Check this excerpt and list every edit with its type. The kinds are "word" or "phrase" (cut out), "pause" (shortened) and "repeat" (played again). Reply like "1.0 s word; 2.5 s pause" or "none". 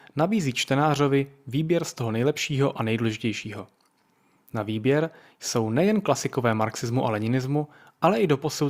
none